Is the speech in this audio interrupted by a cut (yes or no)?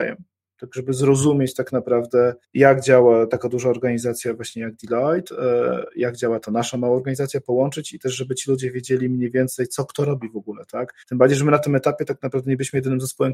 yes